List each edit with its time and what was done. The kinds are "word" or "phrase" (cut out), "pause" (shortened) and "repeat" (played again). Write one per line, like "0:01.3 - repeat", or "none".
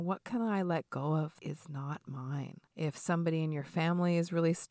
0:01.4 - word
0:02.7 - pause